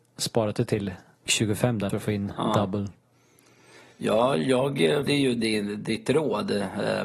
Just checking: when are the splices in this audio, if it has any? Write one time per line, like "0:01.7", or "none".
0:01.3
0:01.9
0:05.1